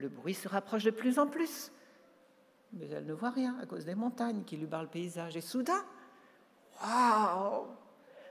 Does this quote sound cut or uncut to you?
uncut